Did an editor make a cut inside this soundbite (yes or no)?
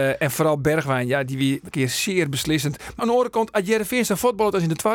yes